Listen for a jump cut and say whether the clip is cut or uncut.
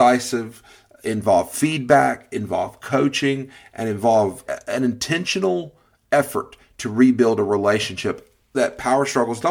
cut